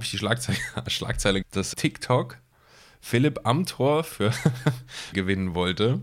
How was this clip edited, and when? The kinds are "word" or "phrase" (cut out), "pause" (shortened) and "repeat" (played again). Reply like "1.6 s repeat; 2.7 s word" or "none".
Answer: 1.4 s word; 1.7 s word; 5.1 s phrase

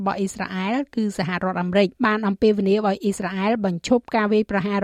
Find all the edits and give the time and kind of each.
1.9 s pause

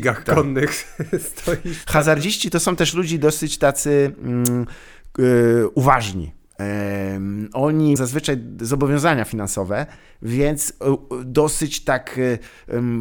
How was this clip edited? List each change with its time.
8.0 s word

